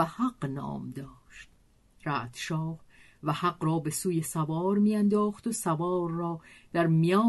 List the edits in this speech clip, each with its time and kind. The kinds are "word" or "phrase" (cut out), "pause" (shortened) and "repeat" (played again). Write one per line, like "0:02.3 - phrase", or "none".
none